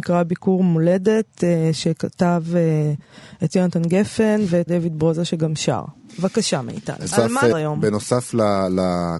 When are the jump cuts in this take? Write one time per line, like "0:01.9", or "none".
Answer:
0:03.5
0:04.7
0:07.1
0:07.5